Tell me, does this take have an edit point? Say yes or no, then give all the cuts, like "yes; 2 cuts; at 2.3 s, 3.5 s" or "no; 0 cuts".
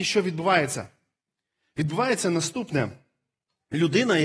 no; 0 cuts